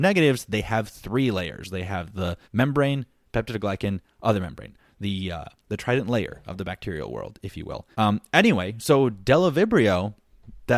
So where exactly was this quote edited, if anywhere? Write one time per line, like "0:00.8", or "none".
0:02.4
0:07.9